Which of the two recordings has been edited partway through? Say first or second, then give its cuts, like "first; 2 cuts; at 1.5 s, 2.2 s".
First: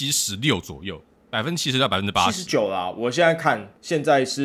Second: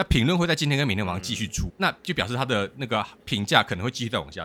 second; 1 cut; at 1.7 s